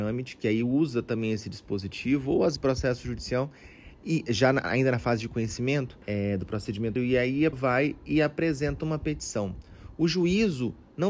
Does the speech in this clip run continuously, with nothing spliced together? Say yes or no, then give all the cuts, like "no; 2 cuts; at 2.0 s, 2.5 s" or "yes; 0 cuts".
no; 4 cuts; at 2.6 s, 6.0 s, 7.0 s, 7.5 s